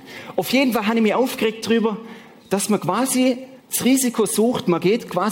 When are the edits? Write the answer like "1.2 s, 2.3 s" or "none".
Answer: 3.6 s